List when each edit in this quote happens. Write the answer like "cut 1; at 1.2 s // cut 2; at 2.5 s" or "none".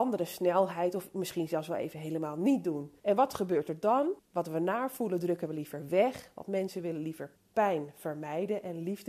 cut 1; at 3.0 s // cut 2; at 4.2 s // cut 3; at 7.4 s